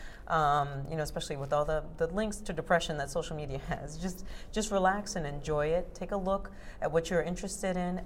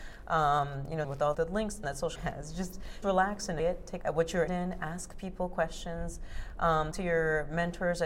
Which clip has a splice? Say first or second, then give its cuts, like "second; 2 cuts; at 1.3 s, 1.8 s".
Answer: second; 9 cuts; at 1.0 s, 1.3 s, 1.8 s, 2.2 s, 3.0 s, 3.6 s, 4.0 s, 4.5 s, 6.9 s